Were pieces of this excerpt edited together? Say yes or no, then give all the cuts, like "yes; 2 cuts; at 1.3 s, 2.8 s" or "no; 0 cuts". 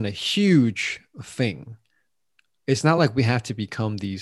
no; 0 cuts